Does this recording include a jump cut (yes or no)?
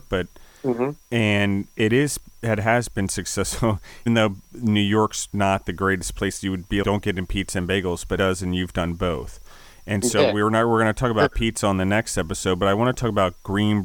yes